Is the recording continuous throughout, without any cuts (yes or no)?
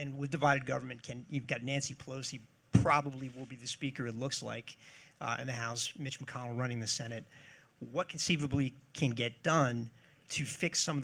yes